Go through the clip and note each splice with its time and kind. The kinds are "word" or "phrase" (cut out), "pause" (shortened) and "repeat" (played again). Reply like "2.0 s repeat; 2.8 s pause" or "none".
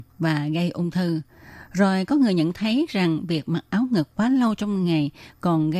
none